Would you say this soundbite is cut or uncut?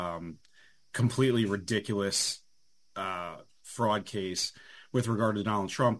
uncut